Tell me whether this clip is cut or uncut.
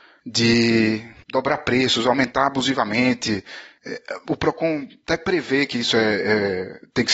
uncut